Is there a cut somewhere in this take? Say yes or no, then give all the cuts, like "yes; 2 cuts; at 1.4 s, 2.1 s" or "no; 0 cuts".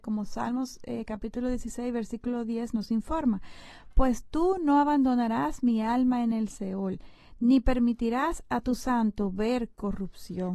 no; 0 cuts